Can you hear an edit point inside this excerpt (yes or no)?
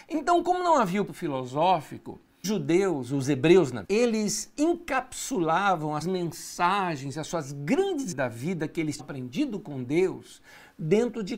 yes